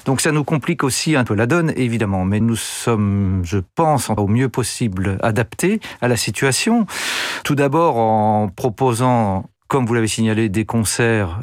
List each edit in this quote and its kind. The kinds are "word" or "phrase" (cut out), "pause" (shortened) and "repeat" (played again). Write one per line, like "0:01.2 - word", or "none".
0:01.3 - phrase
0:02.4 - word
0:04.2 - phrase
0:09.6 - pause